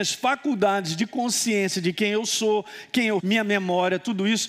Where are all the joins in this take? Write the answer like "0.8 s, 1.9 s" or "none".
3.2 s